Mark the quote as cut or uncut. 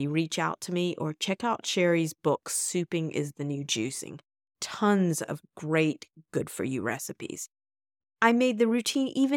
uncut